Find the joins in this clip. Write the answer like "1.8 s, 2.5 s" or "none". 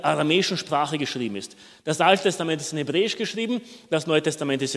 none